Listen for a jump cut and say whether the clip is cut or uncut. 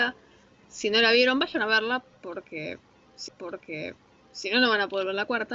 cut